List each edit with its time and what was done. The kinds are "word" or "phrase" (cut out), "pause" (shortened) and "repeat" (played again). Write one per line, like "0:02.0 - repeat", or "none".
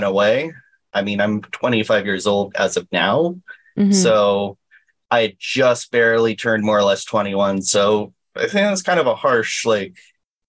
none

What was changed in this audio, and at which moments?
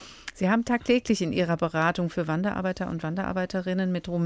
none

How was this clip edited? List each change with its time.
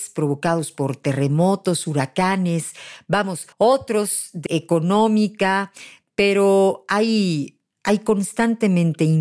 0:03.5 - pause
0:04.5 - word

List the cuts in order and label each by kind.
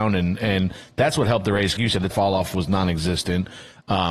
0:01.8 - word
0:02.1 - word

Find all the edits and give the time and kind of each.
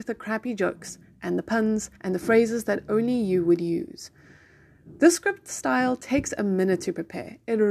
0:02.0 - pause

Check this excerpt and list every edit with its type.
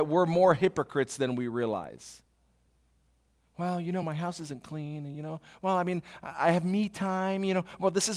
none

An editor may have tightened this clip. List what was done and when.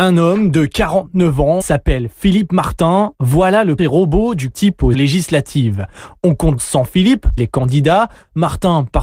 0:01.6 - word
0:03.8 - word
0:04.5 - word
0:04.9 - word
0:06.6 - word
0:07.4 - word

